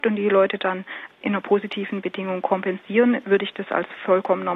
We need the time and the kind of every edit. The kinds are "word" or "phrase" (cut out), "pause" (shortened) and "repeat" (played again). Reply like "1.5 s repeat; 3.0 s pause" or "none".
none